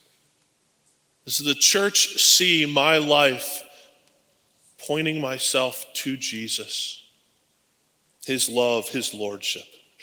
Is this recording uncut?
yes; 0 cuts

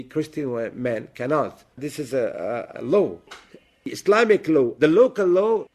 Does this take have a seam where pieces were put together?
yes; 3 cuts; at 1.7 s, 2.7 s, 4.8 s

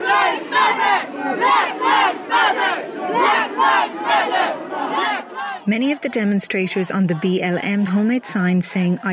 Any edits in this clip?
yes; 1 cut; at 7.9 s

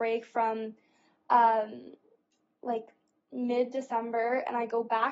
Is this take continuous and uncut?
yes; 0 cuts

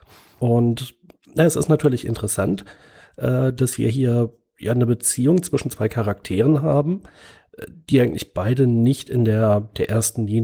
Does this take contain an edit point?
no; 0 cuts

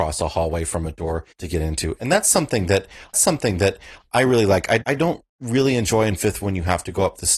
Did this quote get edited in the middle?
yes; 4 cuts; at 1.3 s, 3.1 s, 4.8 s, 6.4 s

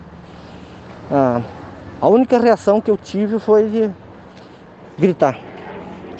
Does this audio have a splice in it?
no; 0 cuts

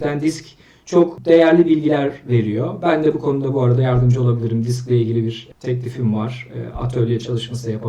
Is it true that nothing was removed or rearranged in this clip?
yes; 0 cuts

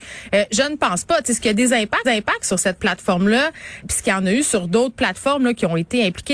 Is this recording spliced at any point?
yes; 2 cuts; at 2.0 s, 3.8 s

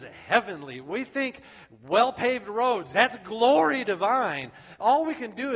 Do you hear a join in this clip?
no; 0 cuts

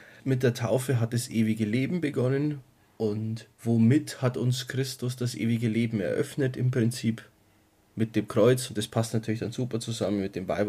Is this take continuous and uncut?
yes; 0 cuts

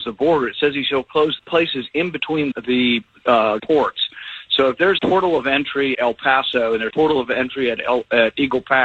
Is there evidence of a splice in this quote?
yes; 6 cuts; at 1.4 s, 2.5 s, 3.6 s, 5.0 s, 5.9 s, 6.9 s

